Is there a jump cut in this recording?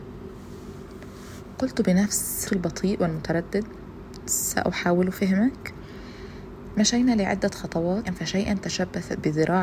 yes; 2 cuts; at 2.4 s, 8.0 s

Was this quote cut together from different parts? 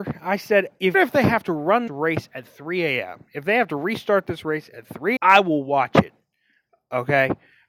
yes; 3 cuts; at 0.9 s, 1.9 s, 5.2 s

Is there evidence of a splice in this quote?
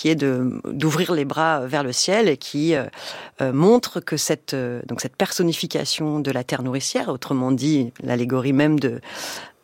no; 0 cuts

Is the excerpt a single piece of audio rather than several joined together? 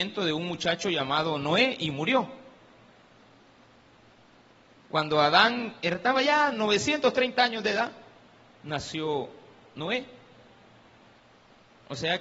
yes; 0 cuts

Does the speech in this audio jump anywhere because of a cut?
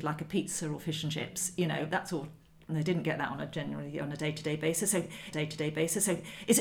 yes; 1 cut; at 5.3 s

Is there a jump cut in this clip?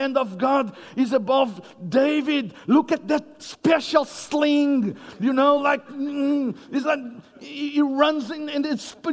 no; 0 cuts

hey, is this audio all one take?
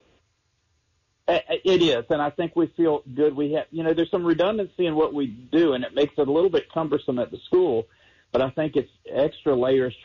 yes; 0 cuts

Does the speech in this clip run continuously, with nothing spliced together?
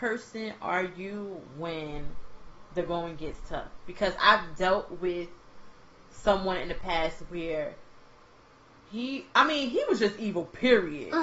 yes; 0 cuts

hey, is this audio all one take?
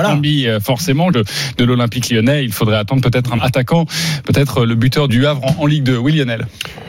no; 3 cuts; at 1.1 s, 3.4 s, 5.1 s

